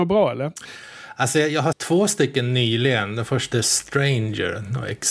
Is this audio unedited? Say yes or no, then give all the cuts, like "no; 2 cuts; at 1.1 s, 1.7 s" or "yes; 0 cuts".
no; 2 cuts; at 1.7 s, 3.5 s